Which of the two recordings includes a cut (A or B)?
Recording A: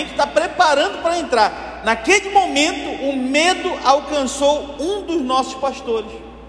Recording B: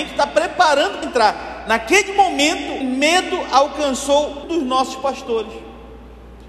B